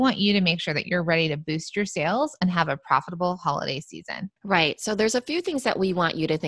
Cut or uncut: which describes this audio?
cut